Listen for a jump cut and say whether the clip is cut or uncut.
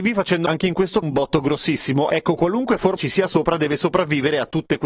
cut